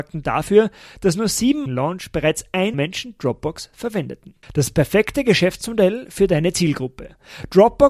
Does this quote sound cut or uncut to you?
cut